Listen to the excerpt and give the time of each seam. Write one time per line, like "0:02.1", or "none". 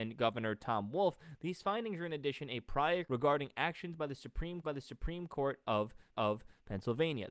0:03.0
0:04.6
0:06.1